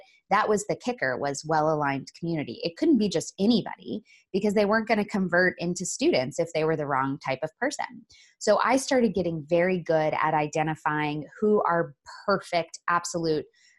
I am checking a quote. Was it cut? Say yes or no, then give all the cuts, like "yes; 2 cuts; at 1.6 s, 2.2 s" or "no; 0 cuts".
no; 0 cuts